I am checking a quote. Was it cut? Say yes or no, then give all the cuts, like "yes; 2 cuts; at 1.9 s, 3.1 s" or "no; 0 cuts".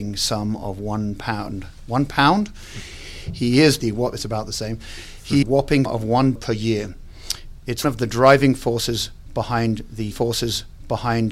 yes; 6 cuts; at 3.8 s, 5.4 s, 5.9 s, 6.4 s, 7.8 s, 10.1 s